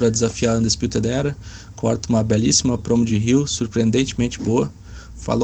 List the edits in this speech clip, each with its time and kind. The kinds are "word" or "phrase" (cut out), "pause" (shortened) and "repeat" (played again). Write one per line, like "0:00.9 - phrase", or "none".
none